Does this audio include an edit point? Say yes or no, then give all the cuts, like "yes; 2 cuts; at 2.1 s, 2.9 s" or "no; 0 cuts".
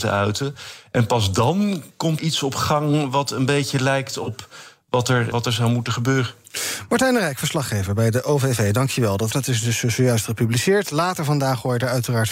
yes; 3 cuts; at 2.2 s, 5.3 s, 9.3 s